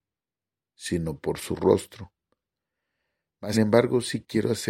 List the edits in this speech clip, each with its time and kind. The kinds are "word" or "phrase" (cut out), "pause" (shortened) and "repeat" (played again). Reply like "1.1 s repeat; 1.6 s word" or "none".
3.5 s word